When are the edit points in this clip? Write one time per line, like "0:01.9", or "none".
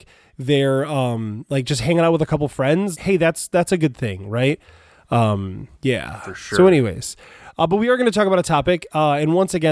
0:02.9
0:05.7